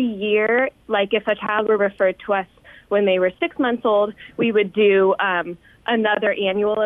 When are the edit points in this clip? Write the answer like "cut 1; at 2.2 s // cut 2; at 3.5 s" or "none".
none